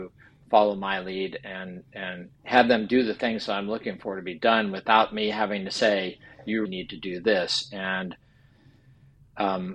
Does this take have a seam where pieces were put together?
yes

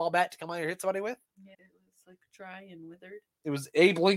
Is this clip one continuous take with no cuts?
no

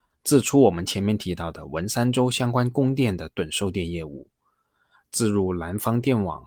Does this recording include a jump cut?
no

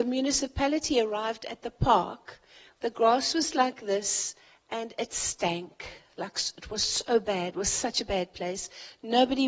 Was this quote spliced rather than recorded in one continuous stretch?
no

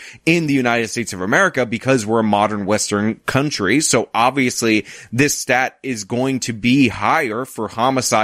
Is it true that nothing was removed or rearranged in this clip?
yes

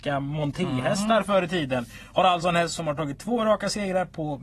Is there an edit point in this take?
no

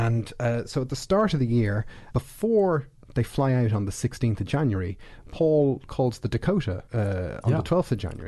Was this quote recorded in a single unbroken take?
no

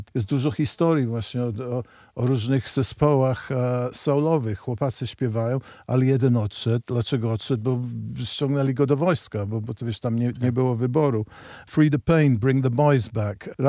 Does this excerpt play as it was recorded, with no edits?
yes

